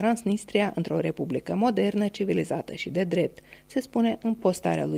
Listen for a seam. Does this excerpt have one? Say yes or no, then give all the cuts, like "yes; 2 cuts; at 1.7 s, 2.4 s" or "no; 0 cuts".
no; 0 cuts